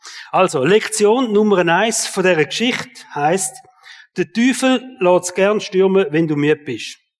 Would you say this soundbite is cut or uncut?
uncut